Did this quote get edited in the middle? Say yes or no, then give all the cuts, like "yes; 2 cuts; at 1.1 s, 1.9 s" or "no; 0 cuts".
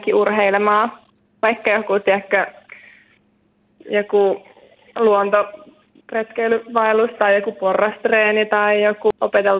no; 0 cuts